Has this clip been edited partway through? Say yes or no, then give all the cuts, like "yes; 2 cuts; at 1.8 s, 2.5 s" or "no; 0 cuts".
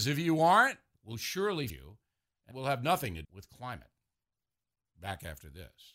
yes; 4 cuts; at 0.9 s, 1.7 s, 2.5 s, 3.2 s